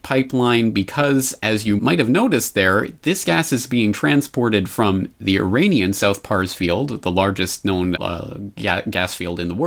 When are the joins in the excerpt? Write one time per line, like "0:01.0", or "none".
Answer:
0:01.8
0:08.0

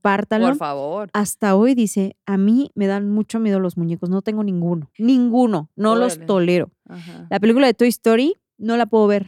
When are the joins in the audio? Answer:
0:04.9

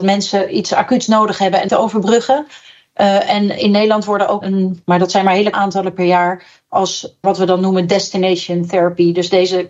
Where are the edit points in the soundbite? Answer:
0:01.7
0:03.6
0:04.4
0:05.5
0:07.2

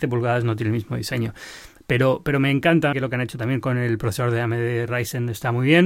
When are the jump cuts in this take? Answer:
0:02.9

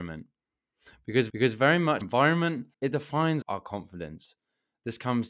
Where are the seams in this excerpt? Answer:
0:01.3
0:02.0
0:02.7
0:03.4

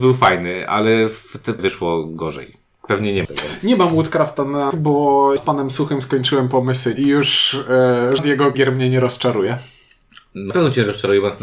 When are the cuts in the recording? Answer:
0:01.6
0:03.2
0:04.7
0:05.4
0:07.0
0:08.2
0:08.5
0:10.5

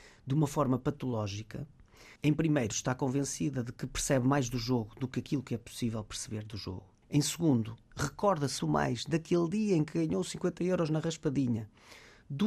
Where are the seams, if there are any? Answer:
0:02.2
0:07.0
0:08.6

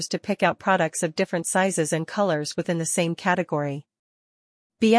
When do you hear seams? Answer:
none

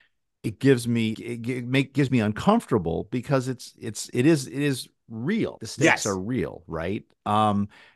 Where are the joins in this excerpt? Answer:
0:01.1
0:02.1
0:05.6

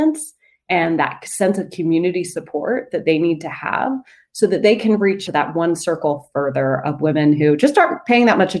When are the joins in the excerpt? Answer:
0:05.3

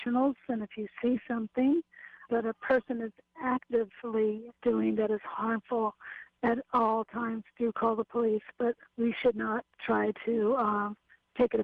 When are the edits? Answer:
0:02.3
0:04.6
0:09.7

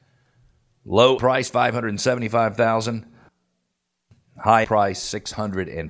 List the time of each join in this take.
0:01.2
0:04.6

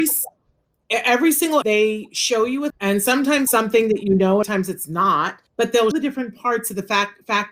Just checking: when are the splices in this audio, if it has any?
0:01.6
0:02.7
0:03.5
0:04.4
0:05.5
0:05.9

